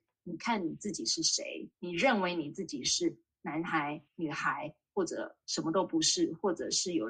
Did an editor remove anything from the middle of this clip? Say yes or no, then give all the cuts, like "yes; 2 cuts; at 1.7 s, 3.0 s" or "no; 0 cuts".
yes; 2 cuts; at 1.7 s, 4.1 s